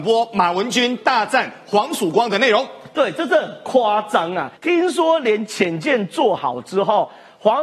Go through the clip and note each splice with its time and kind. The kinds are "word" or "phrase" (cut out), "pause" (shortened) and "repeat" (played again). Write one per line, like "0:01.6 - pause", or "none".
0:04.6 - pause